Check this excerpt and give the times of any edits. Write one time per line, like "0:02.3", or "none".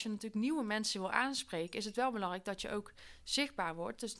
none